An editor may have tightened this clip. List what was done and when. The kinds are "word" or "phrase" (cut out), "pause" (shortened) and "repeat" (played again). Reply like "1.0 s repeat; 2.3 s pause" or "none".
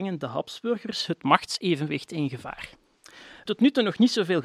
3.4 s word